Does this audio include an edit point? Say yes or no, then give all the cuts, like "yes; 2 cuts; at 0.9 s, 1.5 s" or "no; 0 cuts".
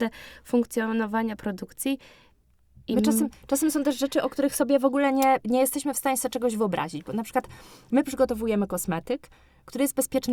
no; 0 cuts